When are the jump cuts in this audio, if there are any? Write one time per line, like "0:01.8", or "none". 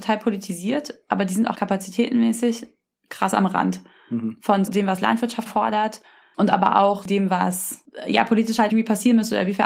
0:01.5
0:04.7
0:05.5
0:08.7